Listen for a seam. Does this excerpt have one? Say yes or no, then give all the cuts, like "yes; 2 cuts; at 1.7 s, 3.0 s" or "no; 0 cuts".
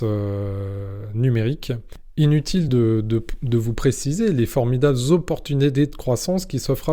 no; 0 cuts